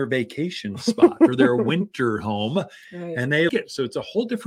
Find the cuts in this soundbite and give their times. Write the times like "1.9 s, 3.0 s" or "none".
3.5 s